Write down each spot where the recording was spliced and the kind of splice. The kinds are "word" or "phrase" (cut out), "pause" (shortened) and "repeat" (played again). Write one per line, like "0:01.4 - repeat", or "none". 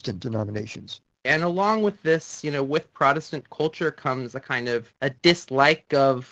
0:05.0 - pause